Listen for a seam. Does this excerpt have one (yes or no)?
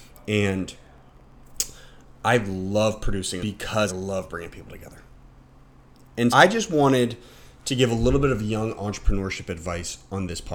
yes